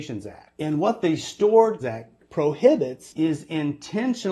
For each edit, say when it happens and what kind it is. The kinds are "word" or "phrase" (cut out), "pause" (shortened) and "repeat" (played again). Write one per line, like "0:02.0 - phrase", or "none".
0:01.8 - word